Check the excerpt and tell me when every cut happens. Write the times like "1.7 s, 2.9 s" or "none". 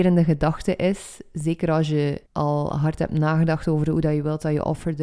2.3 s